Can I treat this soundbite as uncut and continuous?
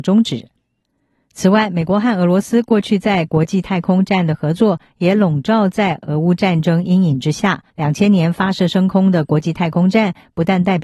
no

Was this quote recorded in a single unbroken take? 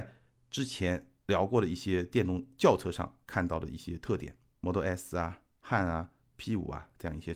yes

